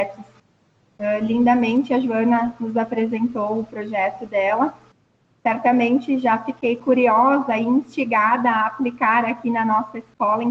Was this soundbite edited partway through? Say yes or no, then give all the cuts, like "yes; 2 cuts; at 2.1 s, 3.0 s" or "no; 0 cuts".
no; 0 cuts